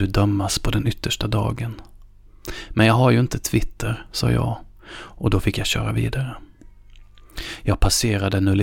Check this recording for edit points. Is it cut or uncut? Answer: uncut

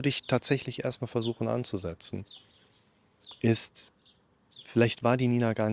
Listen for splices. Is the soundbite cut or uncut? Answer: uncut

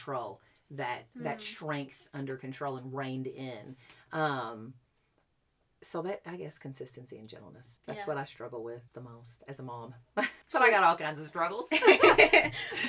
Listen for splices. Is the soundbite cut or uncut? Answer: cut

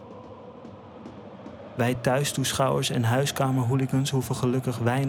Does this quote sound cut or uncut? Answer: uncut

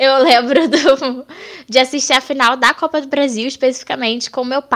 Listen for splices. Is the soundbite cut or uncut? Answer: uncut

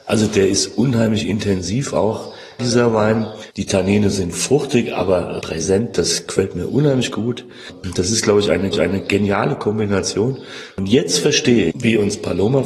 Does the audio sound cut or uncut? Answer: cut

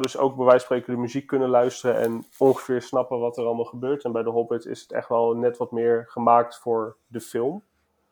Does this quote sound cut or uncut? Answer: uncut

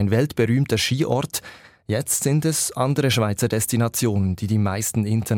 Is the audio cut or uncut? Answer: uncut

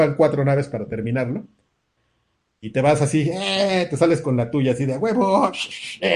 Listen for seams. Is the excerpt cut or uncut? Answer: uncut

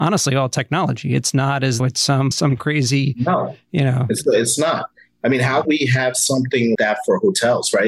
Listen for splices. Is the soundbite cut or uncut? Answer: cut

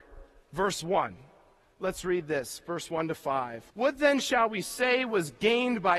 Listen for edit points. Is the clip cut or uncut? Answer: cut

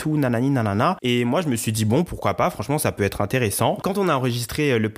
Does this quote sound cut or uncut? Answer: uncut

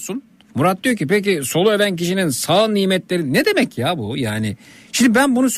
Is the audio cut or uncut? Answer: uncut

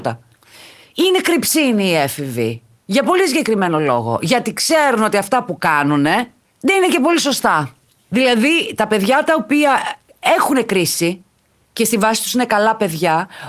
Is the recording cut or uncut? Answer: uncut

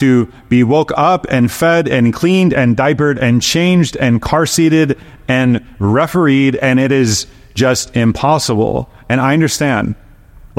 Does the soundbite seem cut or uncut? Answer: uncut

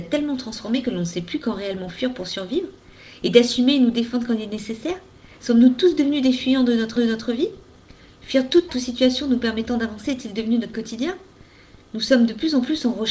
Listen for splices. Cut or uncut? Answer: cut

